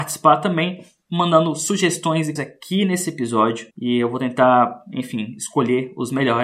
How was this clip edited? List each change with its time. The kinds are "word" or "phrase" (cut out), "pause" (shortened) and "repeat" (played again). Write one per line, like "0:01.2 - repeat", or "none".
0:02.4 - word
0:03.7 - pause